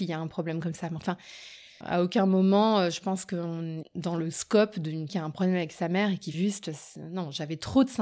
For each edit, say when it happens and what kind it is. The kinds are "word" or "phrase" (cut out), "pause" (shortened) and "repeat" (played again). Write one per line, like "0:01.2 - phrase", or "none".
0:01.8 - word
0:03.8 - word
0:05.1 - word
0:06.3 - word